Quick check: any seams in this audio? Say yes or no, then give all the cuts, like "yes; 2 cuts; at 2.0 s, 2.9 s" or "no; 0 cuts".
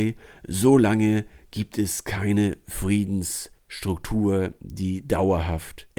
no; 0 cuts